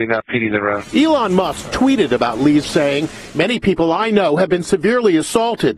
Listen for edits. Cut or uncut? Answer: cut